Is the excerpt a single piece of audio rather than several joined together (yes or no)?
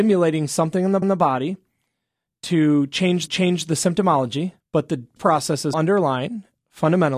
no